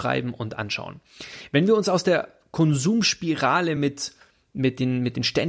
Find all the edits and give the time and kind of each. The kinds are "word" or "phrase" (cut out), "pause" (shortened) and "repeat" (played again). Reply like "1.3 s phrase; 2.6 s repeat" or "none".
none